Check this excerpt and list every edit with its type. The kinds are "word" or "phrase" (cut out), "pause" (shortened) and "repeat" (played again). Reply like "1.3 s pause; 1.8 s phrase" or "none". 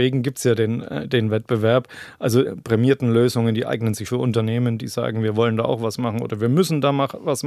2.4 s word; 4.0 s phrase